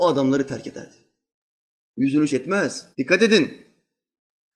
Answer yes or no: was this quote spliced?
yes